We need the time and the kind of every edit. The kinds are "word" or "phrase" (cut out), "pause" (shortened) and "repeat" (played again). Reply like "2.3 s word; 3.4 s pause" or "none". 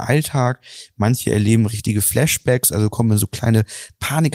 none